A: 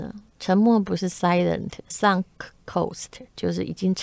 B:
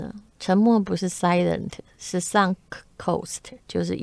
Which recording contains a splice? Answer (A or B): A